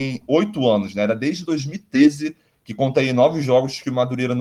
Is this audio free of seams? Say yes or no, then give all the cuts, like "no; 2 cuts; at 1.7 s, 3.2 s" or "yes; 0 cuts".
yes; 0 cuts